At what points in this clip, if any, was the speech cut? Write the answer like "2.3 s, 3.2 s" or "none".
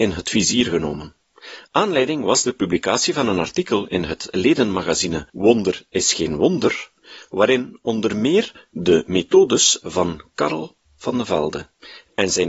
5.3 s